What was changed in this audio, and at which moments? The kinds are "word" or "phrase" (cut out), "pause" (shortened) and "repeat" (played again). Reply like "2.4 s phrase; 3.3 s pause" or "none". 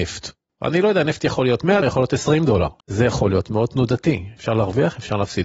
1.8 s word; 2.8 s pause